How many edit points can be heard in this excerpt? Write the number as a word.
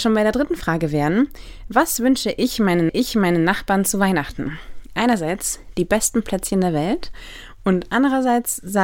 one